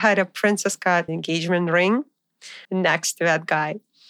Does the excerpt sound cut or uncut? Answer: cut